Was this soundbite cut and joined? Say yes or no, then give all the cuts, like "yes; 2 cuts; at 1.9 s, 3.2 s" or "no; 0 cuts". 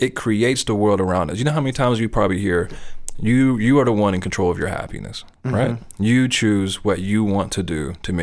no; 0 cuts